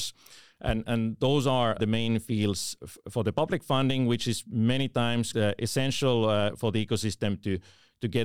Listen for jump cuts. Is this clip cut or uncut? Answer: cut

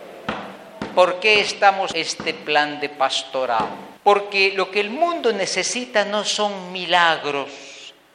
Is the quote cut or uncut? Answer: cut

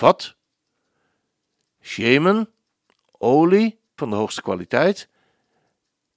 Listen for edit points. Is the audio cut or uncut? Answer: cut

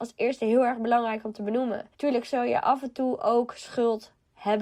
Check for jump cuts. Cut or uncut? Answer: cut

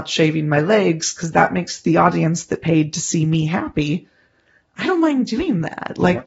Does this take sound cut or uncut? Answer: uncut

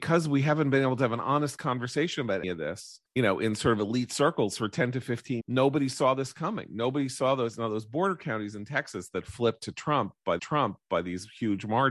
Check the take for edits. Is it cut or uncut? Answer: cut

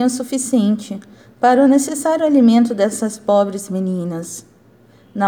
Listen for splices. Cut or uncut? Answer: uncut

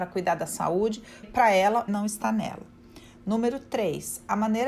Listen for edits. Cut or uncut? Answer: cut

